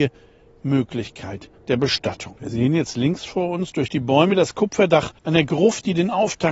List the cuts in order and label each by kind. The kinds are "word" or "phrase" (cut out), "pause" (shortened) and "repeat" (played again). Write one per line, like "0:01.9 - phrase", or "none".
0:02.4 - pause
0:05.2 - pause

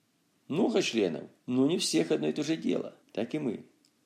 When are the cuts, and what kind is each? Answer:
0:01.4 - pause
0:03.0 - pause

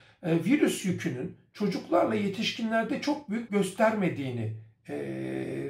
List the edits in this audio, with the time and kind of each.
0:03.5 - word

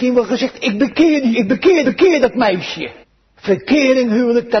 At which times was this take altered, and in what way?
0:01.3 - word
0:01.8 - repeat
0:03.0 - pause

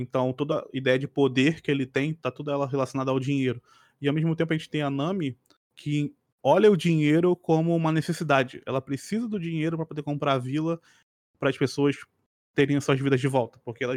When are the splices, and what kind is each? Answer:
none

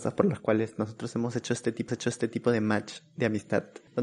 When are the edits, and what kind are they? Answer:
0:01.9 - repeat

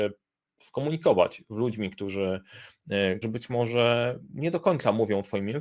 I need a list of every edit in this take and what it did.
0:03.2 - word

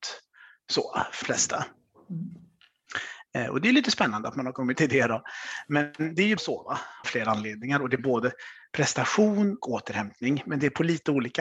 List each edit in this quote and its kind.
0:01.2 - word
0:04.7 - word
0:06.4 - word
0:07.0 - word
0:08.0 - phrase
0:09.6 - word

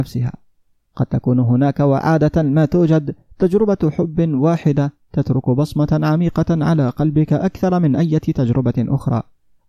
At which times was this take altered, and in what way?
none

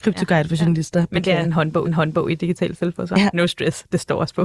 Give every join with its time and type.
0:01.8 - repeat

